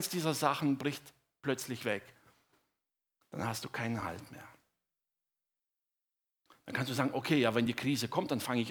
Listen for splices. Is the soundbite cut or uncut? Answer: uncut